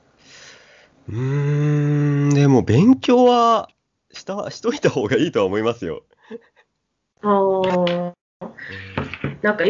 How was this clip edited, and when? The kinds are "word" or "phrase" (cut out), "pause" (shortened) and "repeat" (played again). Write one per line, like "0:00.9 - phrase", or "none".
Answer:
none